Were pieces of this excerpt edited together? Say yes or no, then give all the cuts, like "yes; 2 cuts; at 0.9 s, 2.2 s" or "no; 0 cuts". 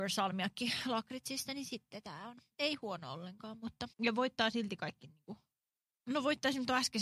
yes; 1 cut; at 3.9 s